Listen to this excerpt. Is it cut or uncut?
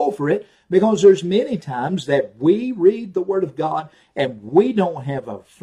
uncut